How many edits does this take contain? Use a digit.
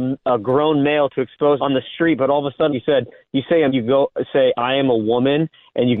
3